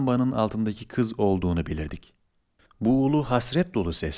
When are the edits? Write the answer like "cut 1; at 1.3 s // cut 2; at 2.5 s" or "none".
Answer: none